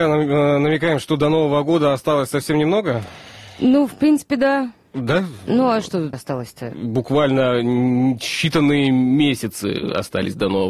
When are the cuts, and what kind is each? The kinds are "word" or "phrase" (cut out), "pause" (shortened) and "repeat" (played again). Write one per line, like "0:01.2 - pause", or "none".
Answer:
0:06.1 - word